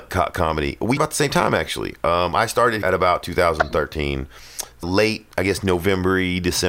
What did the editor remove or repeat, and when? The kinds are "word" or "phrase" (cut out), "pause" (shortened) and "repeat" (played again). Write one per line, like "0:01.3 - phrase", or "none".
0:01.0 - word
0:02.8 - word
0:04.8 - word
0:05.3 - pause